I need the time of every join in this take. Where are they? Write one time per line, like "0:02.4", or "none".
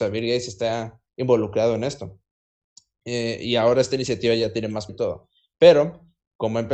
0:04.9